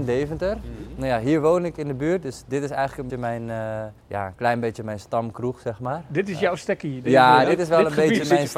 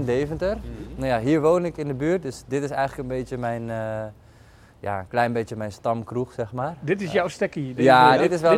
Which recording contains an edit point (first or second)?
first